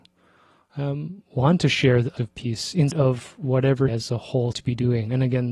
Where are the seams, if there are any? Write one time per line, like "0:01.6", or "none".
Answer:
0:02.2
0:02.9
0:03.9
0:04.5

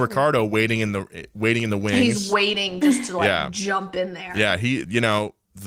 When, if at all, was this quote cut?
none

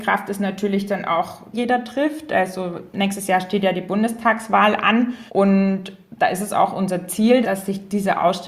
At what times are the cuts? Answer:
0:01.5
0:05.3
0:07.4

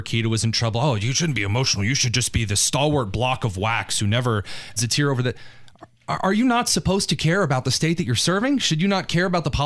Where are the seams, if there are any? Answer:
0:04.8

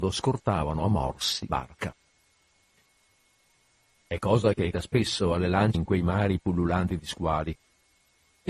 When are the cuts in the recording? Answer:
0:01.5
0:04.7
0:05.7

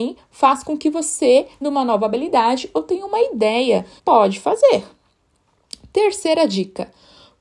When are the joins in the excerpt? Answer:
0:01.6
0:04.0

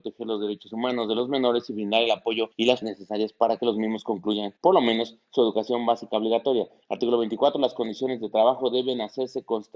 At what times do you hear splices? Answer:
0:02.5
0:02.8
0:04.6

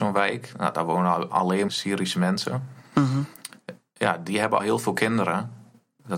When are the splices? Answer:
0:01.7
0:04.6

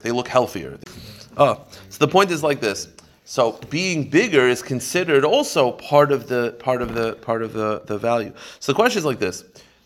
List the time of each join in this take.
none

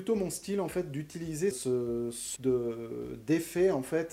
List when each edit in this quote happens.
0:01.5
0:02.4

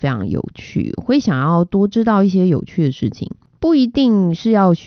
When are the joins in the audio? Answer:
none

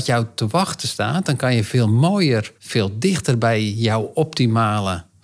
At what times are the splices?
0:02.6

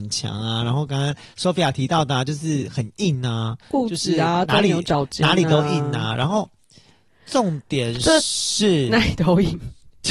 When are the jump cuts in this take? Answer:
none

